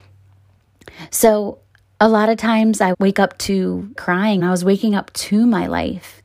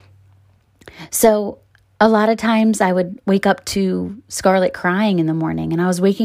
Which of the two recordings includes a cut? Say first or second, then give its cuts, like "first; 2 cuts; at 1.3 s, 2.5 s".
first; 3 cuts; at 2.9 s, 4.0 s, 4.4 s